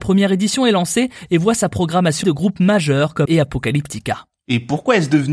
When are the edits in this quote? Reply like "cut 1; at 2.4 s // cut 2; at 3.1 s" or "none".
cut 1; at 2.2 s // cut 2; at 3.2 s

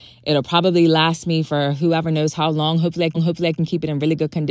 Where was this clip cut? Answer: cut 1; at 3.1 s

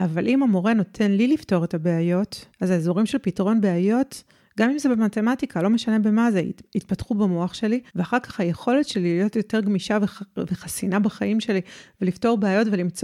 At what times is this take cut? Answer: cut 1; at 2.5 s // cut 2; at 7.9 s

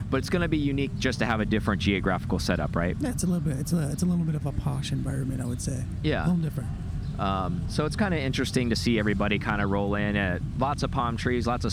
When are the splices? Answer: none

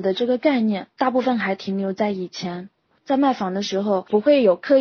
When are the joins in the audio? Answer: none

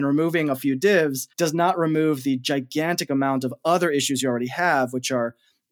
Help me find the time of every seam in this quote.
cut 1; at 1.3 s

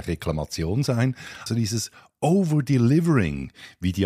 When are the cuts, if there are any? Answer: cut 1; at 1.5 s

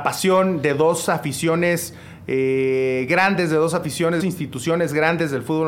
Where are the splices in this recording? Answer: cut 1; at 4.2 s

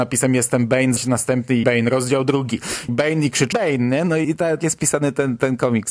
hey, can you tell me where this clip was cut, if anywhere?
cut 1; at 1.0 s // cut 2; at 1.6 s // cut 3; at 2.9 s // cut 4; at 3.5 s // cut 5; at 4.2 s // cut 6; at 4.6 s

